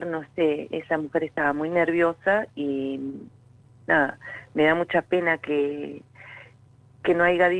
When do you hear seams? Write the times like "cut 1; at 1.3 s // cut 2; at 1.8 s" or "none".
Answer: none